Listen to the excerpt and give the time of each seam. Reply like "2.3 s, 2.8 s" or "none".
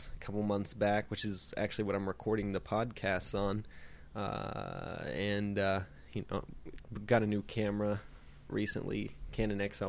8.5 s